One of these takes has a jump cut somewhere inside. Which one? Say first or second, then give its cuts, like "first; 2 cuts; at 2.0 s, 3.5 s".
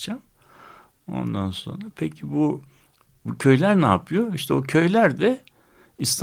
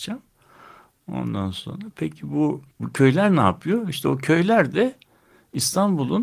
second; 1 cut; at 2.7 s